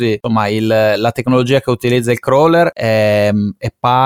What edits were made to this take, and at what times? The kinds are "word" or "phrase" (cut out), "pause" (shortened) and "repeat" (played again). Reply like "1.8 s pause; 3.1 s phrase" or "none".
none